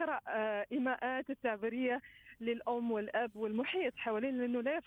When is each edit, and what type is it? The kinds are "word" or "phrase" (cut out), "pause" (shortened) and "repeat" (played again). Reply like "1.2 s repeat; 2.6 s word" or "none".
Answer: 1.2 s word